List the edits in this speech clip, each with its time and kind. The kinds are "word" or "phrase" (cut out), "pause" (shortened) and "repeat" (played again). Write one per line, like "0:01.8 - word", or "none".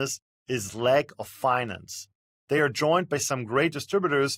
none